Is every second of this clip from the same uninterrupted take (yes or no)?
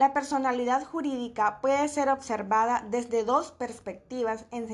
yes